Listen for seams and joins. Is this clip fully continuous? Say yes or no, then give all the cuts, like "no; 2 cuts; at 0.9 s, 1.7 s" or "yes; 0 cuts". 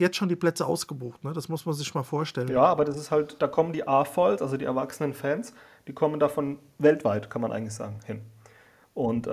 yes; 0 cuts